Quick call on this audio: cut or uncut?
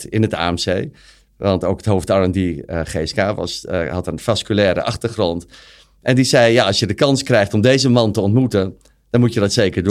uncut